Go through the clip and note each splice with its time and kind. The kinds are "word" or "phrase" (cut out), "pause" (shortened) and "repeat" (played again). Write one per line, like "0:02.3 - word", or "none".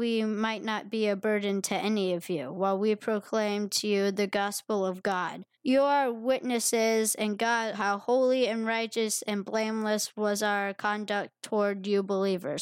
0:05.5 - pause
0:07.7 - word